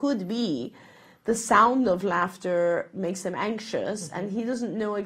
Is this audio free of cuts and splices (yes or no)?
yes